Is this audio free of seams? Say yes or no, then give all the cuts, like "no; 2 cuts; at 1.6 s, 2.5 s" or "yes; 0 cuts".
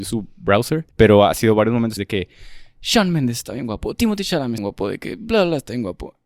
no; 3 cuts; at 0.9 s, 2.0 s, 4.6 s